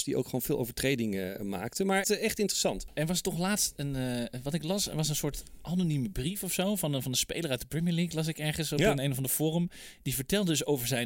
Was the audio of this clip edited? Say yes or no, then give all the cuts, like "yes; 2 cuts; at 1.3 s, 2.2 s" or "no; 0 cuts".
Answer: yes; 1 cut; at 2.0 s